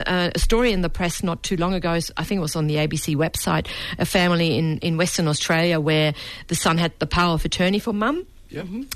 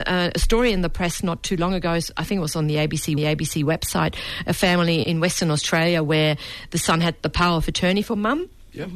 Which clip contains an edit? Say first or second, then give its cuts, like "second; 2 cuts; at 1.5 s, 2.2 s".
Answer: second; 2 cuts; at 3.2 s, 5.0 s